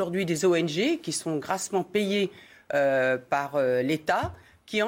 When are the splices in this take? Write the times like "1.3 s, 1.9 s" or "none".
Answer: none